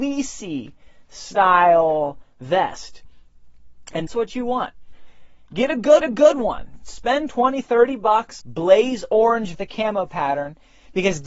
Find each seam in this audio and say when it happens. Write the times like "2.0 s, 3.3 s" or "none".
4.1 s, 6.0 s, 8.4 s, 9.5 s